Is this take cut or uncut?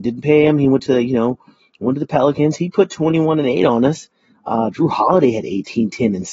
uncut